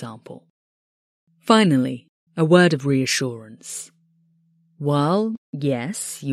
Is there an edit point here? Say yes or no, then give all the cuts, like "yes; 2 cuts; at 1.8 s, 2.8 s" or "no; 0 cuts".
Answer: yes; 1 cut; at 2.3 s